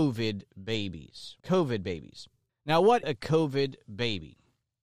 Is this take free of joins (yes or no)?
no